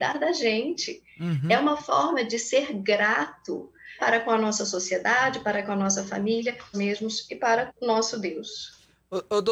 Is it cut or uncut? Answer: cut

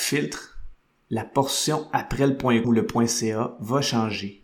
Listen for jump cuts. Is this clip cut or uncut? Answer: cut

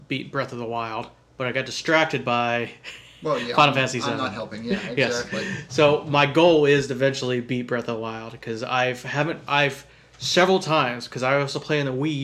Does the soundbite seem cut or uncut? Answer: uncut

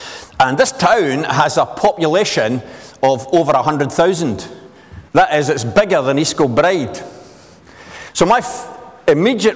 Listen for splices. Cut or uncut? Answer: cut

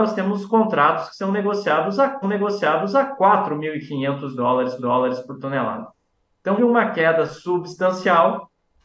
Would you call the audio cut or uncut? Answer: cut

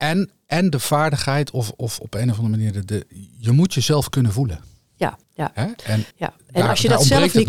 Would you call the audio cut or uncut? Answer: cut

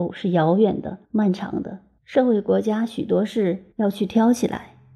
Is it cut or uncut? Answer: cut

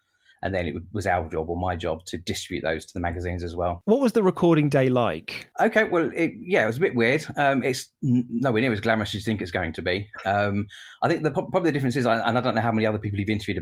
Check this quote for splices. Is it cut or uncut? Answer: uncut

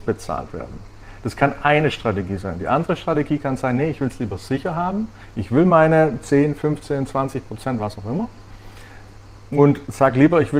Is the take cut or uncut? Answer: uncut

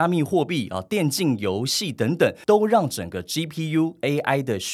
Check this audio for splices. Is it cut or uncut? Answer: uncut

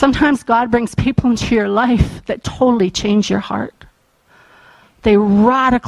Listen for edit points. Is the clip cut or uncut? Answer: uncut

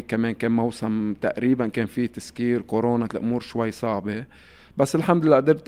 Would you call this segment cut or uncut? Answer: cut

